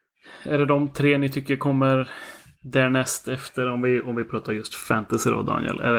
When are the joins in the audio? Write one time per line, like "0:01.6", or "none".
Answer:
none